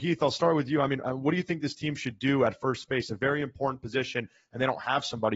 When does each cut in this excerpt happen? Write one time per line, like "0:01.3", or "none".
none